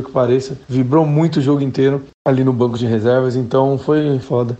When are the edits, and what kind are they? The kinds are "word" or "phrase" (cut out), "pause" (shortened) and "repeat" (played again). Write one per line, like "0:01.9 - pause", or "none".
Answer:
none

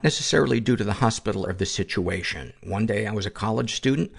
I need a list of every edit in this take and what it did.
0:01.5 - phrase

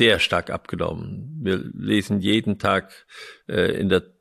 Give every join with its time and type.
none

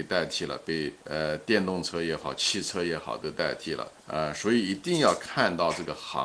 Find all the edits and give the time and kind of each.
0:01.0 - pause
0:04.0 - pause

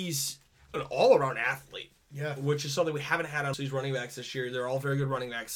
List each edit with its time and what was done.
0:02.0 - pause
0:03.5 - word

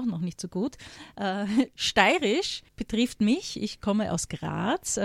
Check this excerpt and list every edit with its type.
0:02.7 - pause

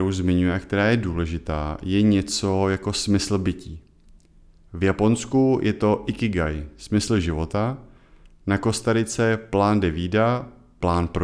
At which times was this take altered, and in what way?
none

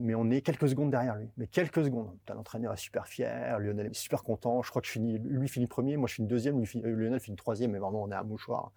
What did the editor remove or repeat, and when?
0:03.9 - word

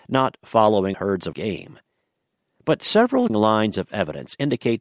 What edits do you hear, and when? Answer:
0:00.9 - word
0:01.3 - word
0:03.3 - word

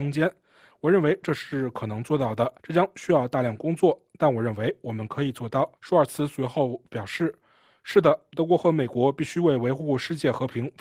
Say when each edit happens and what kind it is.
0:02.6 - pause
0:05.8 - pause

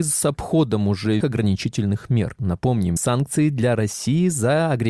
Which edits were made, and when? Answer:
0:01.2 - word
0:03.0 - phrase

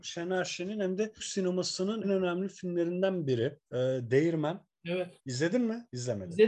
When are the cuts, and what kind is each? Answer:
0:01.2 - word
0:02.0 - word
0:03.6 - pause
0:05.2 - pause

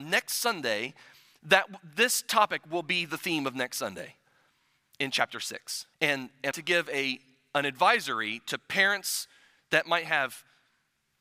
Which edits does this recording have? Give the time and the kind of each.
0:05.9 - pause
0:06.5 - phrase

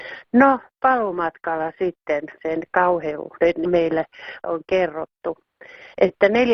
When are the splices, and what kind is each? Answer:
0:02.4 - word
0:03.6 - word
0:04.4 - word

